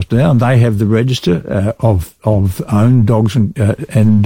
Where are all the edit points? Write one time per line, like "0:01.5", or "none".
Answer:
none